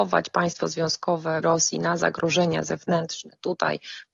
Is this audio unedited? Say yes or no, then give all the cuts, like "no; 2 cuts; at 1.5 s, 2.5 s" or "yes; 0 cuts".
no; 1 cut; at 1.4 s